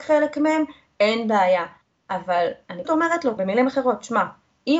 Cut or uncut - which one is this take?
cut